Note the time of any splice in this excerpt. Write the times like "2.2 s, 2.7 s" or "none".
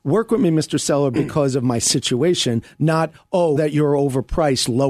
3.6 s